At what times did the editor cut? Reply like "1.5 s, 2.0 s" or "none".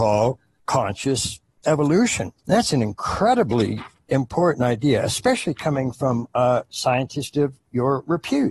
2.4 s